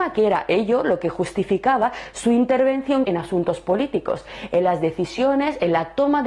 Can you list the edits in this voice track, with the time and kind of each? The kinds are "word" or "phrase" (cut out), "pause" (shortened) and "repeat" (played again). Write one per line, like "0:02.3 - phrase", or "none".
0:03.0 - word